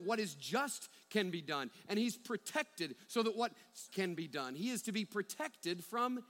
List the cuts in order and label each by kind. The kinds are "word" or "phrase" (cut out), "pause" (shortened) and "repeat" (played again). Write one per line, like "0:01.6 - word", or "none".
0:03.9 - word